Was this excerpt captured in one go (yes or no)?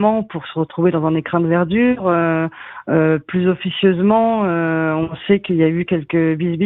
yes